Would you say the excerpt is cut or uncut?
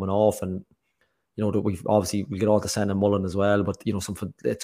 uncut